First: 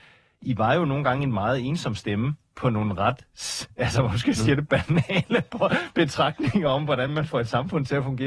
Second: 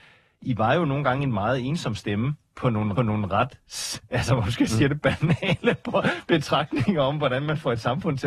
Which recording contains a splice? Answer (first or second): second